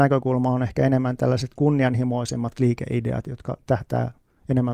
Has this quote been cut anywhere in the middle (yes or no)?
no